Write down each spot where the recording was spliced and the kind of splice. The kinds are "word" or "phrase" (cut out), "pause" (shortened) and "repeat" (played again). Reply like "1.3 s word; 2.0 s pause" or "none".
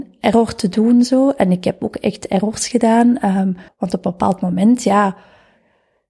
3.7 s pause